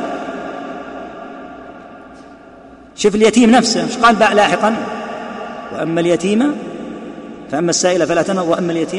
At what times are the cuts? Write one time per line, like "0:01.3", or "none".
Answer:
none